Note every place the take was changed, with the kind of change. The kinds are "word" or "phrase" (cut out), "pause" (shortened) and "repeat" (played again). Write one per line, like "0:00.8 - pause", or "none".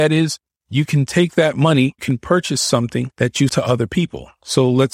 0:02.0 - phrase
0:03.1 - pause
0:03.5 - word